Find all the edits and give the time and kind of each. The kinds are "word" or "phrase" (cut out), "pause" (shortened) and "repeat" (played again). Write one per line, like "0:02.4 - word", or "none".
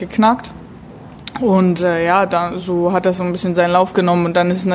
none